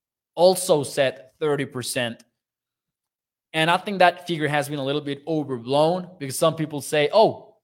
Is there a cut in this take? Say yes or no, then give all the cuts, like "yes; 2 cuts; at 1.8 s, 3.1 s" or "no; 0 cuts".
no; 0 cuts